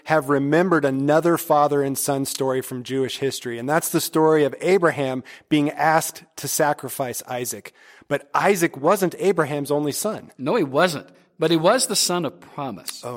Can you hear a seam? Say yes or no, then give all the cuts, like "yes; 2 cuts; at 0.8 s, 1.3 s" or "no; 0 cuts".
no; 0 cuts